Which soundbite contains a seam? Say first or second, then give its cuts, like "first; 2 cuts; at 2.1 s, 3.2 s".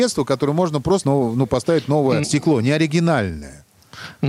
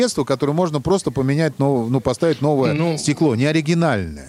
first; 2 cuts; at 1.0 s, 2.2 s